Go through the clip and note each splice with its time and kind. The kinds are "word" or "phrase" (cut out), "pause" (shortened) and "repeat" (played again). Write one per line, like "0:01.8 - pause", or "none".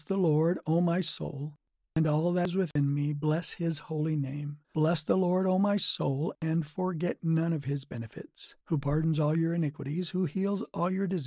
0:04.6 - pause
0:08.6 - pause